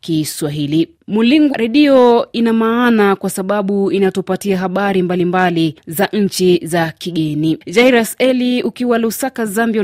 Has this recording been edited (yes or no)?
yes